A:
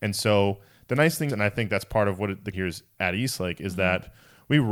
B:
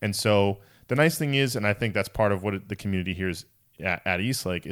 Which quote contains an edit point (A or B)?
A